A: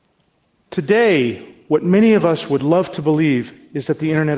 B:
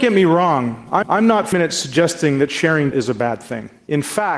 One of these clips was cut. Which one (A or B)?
B